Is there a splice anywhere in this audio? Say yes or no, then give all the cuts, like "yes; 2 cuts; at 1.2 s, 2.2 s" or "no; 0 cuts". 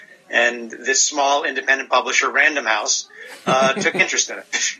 no; 0 cuts